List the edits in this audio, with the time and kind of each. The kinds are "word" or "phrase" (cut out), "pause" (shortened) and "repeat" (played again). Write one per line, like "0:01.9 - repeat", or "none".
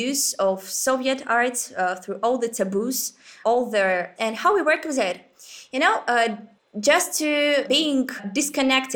0:06.6 - pause

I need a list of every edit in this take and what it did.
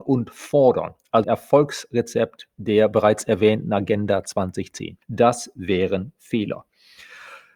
0:01.2 - word

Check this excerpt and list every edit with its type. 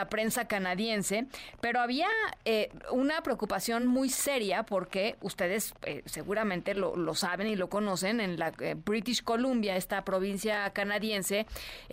none

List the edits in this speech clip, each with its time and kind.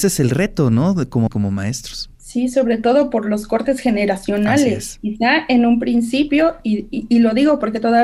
0:01.3 - word
0:02.1 - pause

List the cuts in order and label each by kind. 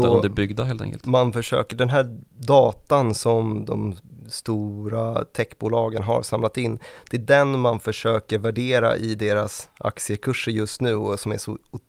0:02.3 - pause

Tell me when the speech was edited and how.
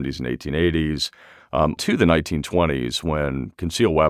0:01.8 - word

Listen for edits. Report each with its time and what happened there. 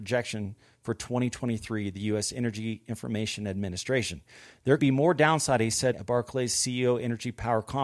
0:04.8 - word
0:05.9 - word

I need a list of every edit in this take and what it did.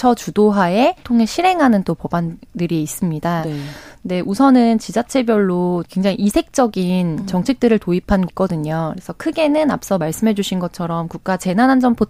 0:01.0 - word
0:05.8 - word
0:08.3 - word

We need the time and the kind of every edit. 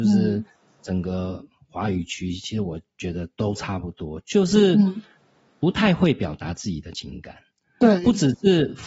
none

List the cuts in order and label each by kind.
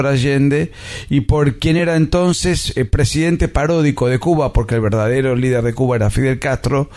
none

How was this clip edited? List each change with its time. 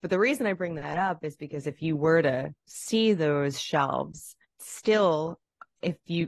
0:02.6 - pause
0:04.4 - word

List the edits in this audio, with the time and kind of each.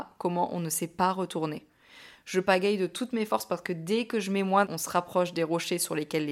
0:04.7 - word

